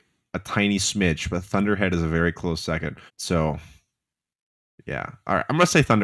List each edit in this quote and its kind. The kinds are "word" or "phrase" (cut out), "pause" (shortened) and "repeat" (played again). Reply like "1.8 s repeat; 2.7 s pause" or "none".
3.1 s pause